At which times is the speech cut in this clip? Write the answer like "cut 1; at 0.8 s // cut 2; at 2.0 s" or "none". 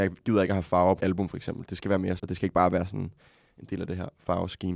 cut 1; at 1.0 s // cut 2; at 2.2 s